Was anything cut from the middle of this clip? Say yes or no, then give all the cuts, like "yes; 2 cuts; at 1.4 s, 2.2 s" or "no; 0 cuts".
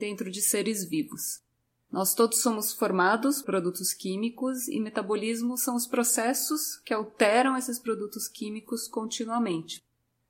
yes; 1 cut; at 3.4 s